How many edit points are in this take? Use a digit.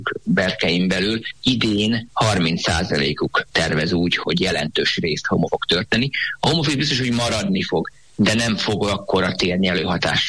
2